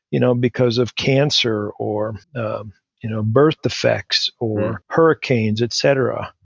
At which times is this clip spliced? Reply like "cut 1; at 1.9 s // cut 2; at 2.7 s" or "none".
cut 1; at 2.2 s // cut 2; at 4.8 s